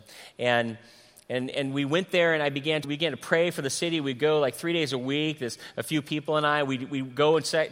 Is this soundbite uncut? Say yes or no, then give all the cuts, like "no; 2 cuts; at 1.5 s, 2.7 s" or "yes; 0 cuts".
no; 1 cut; at 2.8 s